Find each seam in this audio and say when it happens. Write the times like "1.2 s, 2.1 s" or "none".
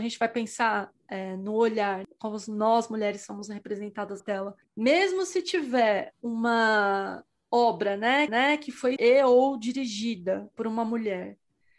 4.2 s, 4.6 s, 8.3 s, 9.0 s

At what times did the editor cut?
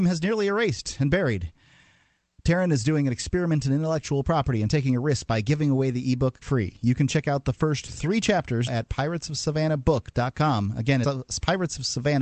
6.4 s, 8.7 s, 11.0 s

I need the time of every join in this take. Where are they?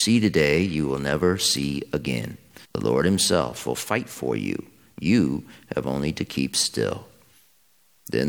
2.6 s

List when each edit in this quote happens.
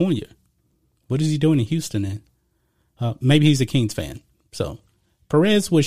none

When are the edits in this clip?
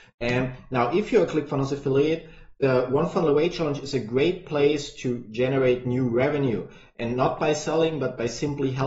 none

